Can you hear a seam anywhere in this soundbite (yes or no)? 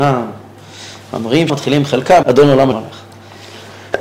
yes